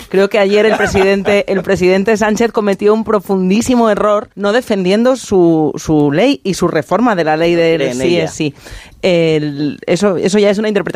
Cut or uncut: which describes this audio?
cut